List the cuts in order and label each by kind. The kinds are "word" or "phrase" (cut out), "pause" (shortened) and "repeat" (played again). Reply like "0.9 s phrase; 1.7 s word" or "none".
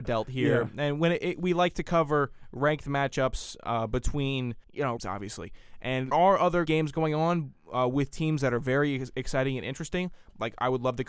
4.6 s pause; 5.0 s phrase; 6.1 s word; 6.7 s word